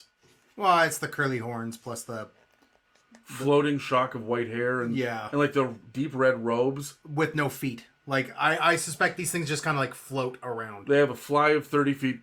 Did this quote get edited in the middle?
no; 0 cuts

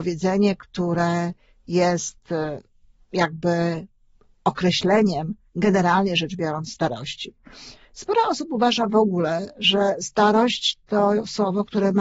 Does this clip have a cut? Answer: no; 0 cuts

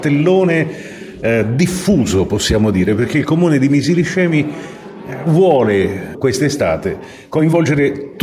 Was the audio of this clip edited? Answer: no; 0 cuts

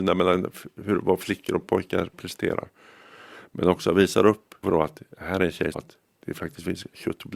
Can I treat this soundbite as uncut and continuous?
no; 2 cuts; at 4.6 s, 5.7 s

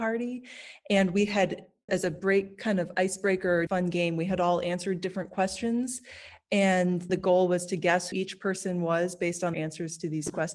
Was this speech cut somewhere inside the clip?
yes; 5 cuts; at 1.9 s, 3.7 s, 7.1 s, 8.1 s, 9.5 s

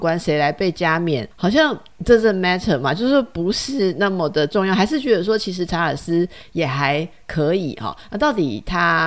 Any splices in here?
yes; 1 cut; at 1.3 s

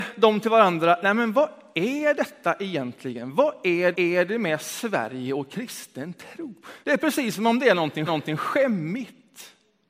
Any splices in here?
yes; 3 cuts; at 3.9 s, 6.8 s, 8.1 s

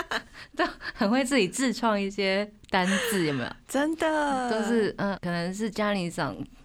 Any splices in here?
yes; 1 cut; at 5.2 s

